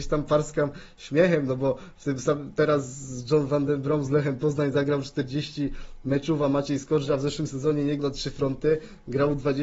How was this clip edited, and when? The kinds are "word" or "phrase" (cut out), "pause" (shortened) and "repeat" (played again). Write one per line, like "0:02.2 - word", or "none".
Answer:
0:08.0 - word